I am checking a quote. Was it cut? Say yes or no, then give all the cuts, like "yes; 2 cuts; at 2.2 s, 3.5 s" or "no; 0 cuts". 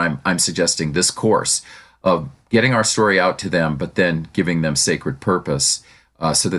no; 0 cuts